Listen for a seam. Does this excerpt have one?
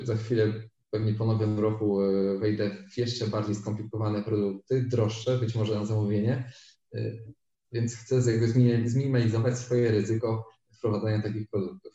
no; 0 cuts

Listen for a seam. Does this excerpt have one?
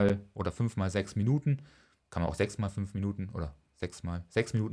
no; 0 cuts

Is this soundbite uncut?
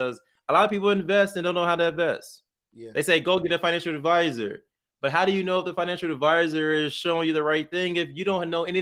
yes; 0 cuts

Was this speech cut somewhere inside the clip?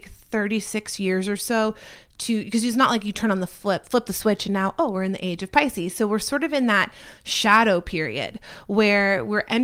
no; 0 cuts

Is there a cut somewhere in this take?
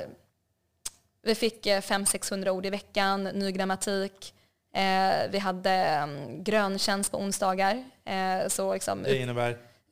no; 0 cuts

